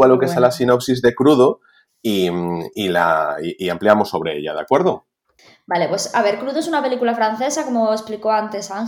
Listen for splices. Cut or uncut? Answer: uncut